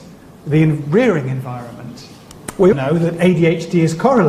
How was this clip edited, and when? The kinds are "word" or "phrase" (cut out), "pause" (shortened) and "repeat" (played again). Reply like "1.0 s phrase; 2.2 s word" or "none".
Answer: 2.7 s word